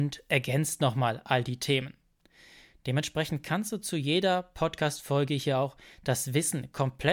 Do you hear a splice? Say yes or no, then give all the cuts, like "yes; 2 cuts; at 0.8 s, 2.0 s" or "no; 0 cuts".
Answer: no; 0 cuts